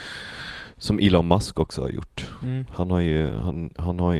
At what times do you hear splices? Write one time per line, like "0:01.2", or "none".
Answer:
none